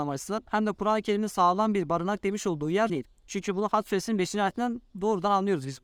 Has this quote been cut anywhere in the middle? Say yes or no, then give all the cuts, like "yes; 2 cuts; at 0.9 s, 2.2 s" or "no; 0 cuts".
yes; 2 cuts; at 2.9 s, 4.9 s